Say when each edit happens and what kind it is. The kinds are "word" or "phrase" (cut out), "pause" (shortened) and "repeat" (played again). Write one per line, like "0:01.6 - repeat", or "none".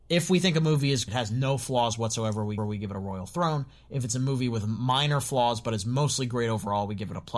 0:01.1 - word
0:02.6 - repeat